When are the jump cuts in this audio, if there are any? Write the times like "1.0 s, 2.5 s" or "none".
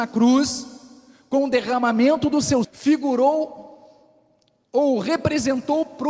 2.6 s